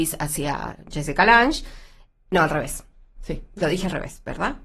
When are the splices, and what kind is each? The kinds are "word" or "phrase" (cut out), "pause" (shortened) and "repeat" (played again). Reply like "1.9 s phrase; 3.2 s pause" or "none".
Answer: none